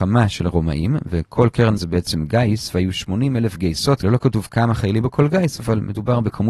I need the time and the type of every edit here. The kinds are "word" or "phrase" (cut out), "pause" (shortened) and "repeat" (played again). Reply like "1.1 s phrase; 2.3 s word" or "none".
1.8 s word; 4.0 s word; 5.0 s word